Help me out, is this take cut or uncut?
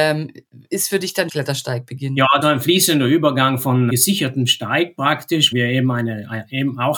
cut